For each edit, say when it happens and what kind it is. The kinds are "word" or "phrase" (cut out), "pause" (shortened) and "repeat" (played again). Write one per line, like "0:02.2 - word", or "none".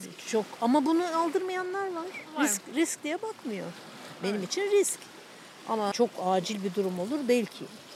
0:05.9 - word